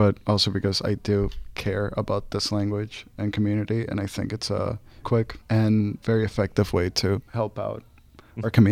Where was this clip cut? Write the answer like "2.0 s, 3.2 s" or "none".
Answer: 5.0 s, 5.4 s